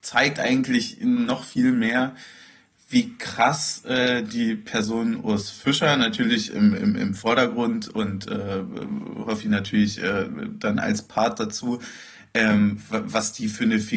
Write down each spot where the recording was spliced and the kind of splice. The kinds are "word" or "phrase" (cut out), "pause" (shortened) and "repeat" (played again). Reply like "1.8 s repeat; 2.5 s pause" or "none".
none